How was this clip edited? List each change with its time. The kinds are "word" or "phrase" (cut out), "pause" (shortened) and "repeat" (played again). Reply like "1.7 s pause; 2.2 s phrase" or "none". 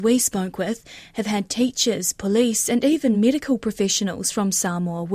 none